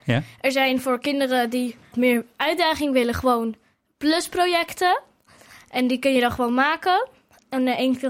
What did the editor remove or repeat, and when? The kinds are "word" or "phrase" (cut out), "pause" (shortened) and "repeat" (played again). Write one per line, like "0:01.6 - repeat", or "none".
0:01.9 - word